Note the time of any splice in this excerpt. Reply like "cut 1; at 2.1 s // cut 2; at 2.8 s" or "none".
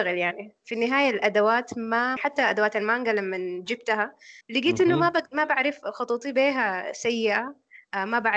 cut 1; at 2.2 s // cut 2; at 4.4 s

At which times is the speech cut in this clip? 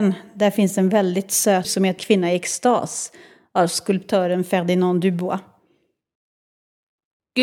cut 1; at 1.6 s // cut 2; at 2.0 s

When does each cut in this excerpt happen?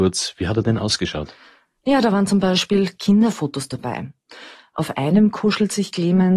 none

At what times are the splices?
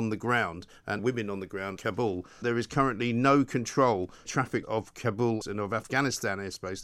cut 1; at 1.0 s // cut 2; at 1.8 s // cut 3; at 2.4 s // cut 4; at 4.3 s // cut 5; at 4.6 s // cut 6; at 5.4 s

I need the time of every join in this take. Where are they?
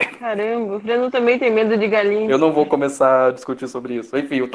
none

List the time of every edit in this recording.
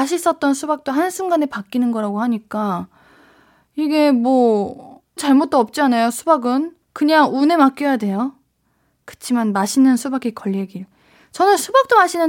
cut 1; at 5.2 s // cut 2; at 6.8 s

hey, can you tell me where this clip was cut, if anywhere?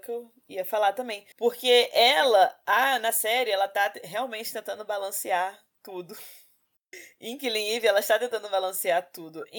cut 1; at 1.3 s

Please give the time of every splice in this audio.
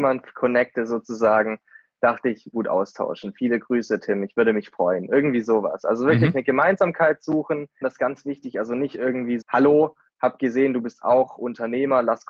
cut 1; at 2.5 s // cut 2; at 7.8 s // cut 3; at 9.4 s

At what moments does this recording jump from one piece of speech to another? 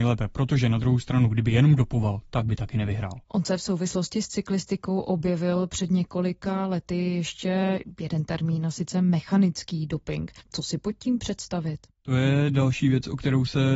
cut 1; at 3.2 s // cut 2; at 10.4 s

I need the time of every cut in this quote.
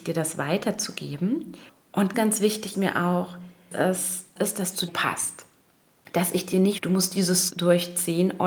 cut 1; at 2.1 s // cut 2; at 2.7 s // cut 3; at 3.7 s // cut 4; at 4.4 s // cut 5; at 4.9 s // cut 6; at 6.8 s // cut 7; at 7.5 s

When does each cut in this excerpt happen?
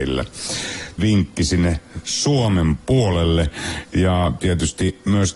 cut 1; at 1.0 s

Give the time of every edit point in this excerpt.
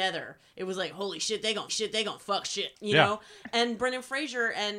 cut 1; at 1.7 s // cut 2; at 2.7 s

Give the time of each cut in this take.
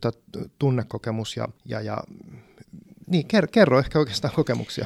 cut 1; at 1.6 s

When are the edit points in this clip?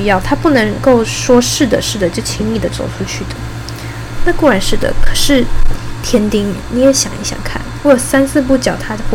cut 1; at 7.8 s

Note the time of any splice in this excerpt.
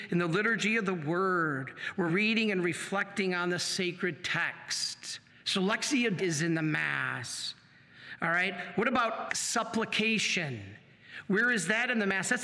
cut 1; at 2.1 s // cut 2; at 5.3 s // cut 3; at 6.2 s // cut 4; at 9.3 s

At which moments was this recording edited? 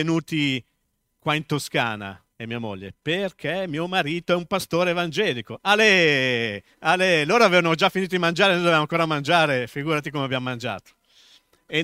cut 1; at 2.3 s // cut 2; at 6.7 s

